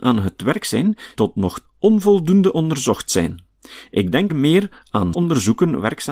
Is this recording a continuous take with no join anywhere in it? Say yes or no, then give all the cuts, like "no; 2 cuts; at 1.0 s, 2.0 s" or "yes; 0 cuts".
no; 4 cuts; at 1.2 s, 1.6 s, 4.3 s, 5.1 s